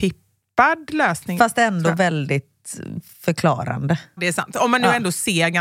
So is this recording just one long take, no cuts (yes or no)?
no